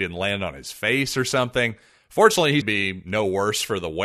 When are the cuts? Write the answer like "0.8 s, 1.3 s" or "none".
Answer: 2.6 s